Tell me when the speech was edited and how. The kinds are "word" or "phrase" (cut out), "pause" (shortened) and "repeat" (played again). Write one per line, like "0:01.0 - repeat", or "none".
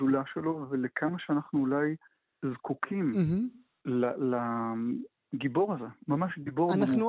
none